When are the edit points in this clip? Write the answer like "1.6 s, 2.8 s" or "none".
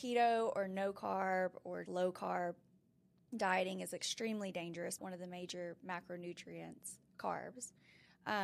1.9 s, 5.0 s